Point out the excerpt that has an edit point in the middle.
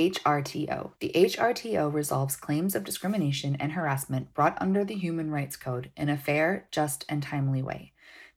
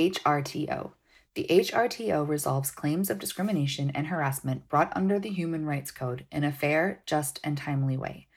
first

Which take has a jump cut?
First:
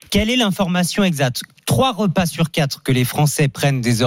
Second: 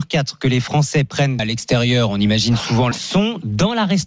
second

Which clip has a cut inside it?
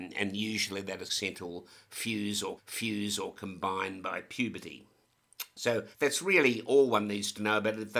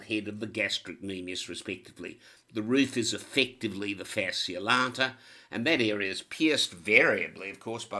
first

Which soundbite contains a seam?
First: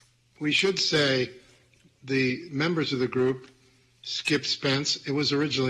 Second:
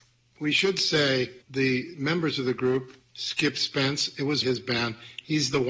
second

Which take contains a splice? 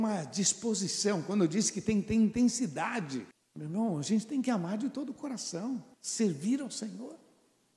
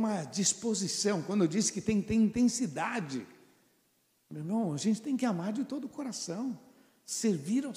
first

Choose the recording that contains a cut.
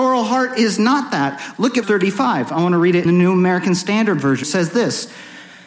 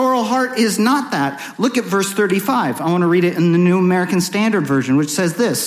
first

